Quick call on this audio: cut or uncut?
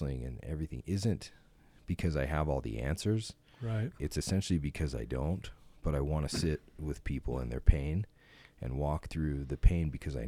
uncut